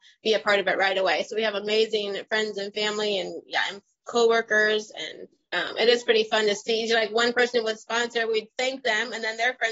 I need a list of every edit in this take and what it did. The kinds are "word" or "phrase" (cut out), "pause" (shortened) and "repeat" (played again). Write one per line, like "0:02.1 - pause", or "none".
none